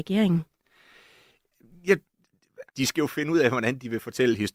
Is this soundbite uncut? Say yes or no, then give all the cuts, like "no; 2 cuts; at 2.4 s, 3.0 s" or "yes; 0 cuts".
no; 1 cut; at 2.7 s